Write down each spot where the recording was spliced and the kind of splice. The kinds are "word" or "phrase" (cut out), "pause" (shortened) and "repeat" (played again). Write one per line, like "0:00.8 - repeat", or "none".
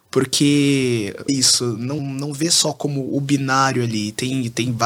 0:01.3 - word
0:02.0 - word